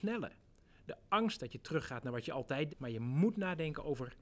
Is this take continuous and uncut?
no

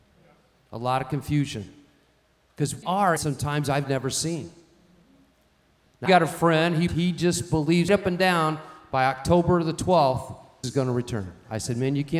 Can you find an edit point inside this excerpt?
yes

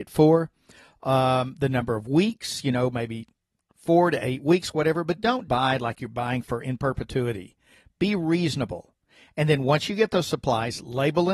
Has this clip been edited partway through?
yes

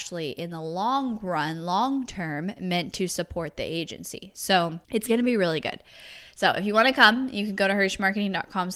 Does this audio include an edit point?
yes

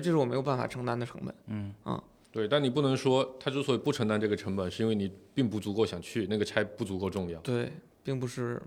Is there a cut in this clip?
yes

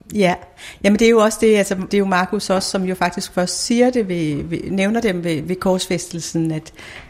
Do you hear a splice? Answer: yes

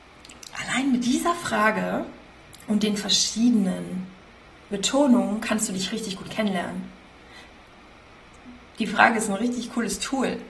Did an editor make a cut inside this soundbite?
no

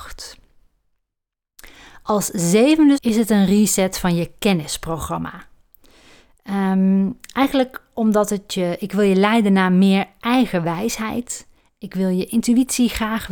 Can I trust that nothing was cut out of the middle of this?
no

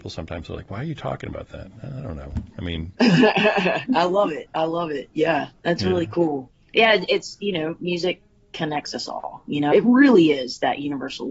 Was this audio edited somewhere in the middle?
yes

